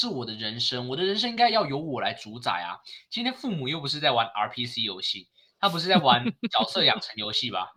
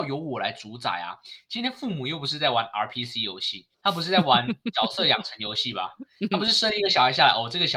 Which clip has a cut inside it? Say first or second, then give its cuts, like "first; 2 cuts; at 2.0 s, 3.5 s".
second; 1 cut; at 3.7 s